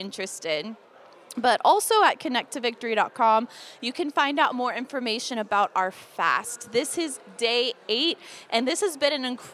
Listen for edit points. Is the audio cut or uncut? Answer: uncut